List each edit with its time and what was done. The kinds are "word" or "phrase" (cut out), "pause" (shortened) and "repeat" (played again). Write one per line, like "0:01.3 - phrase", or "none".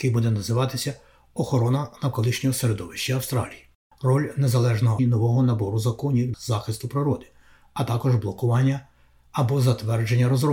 0:03.9 - pause
0:05.0 - phrase
0:06.3 - word

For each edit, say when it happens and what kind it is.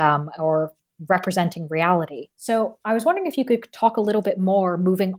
0:02.3 - pause

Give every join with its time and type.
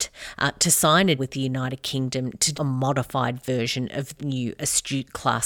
0:01.2 - word
0:02.5 - word
0:04.2 - word

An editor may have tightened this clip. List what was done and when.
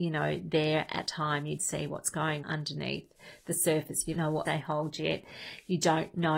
0:01.1 - word
0:01.6 - word
0:02.4 - word
0:04.1 - word
0:04.5 - word

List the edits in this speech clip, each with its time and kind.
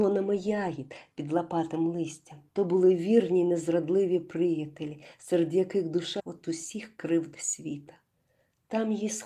0:02.5 - pause
0:06.2 - phrase

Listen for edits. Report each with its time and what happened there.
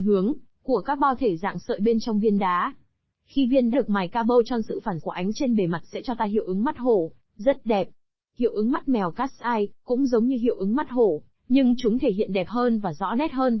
0:03.7 - word
0:05.0 - word
0:05.3 - word

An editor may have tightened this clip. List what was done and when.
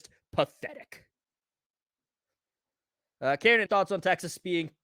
0:03.7 - word

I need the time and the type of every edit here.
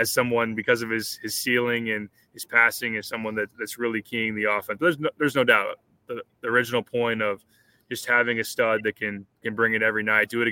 none

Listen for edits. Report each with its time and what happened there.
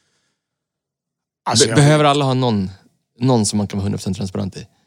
none

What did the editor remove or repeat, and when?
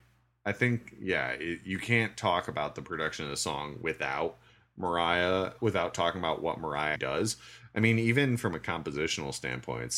0:05.6 - word
0:06.9 - word

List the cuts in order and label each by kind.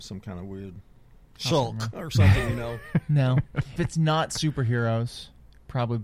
0:01.5 - word
0:03.8 - word

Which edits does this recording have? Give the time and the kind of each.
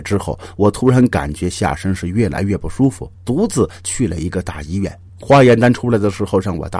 0:03.1 - pause
0:05.1 - pause

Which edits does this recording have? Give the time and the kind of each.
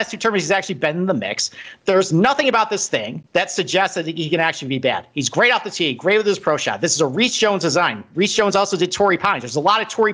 0:03.3 - pause

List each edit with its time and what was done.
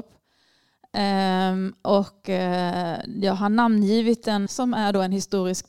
0:04.5 - word

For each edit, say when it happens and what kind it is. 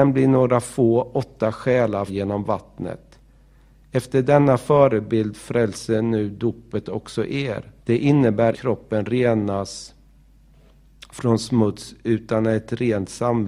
0:02.1 - word
0:07.8 - pause
0:08.5 - phrase

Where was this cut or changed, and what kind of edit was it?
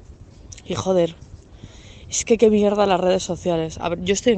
none

